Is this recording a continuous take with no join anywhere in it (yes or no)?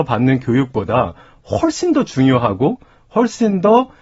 yes